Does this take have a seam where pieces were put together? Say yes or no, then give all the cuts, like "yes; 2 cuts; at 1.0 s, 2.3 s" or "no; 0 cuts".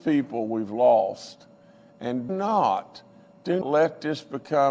yes; 2 cuts; at 2.3 s, 3.6 s